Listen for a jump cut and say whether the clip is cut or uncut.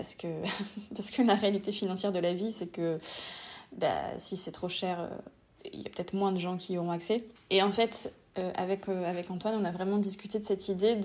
uncut